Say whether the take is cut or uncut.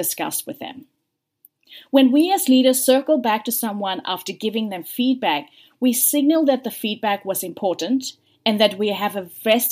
uncut